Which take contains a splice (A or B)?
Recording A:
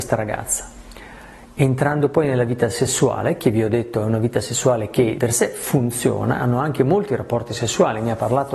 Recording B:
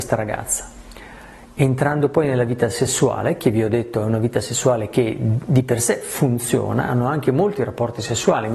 A